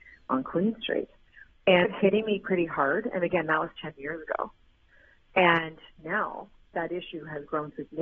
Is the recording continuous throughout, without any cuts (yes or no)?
no